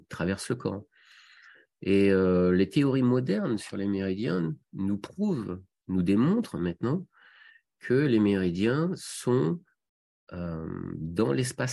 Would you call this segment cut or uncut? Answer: uncut